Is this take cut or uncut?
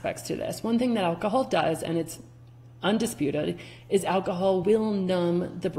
uncut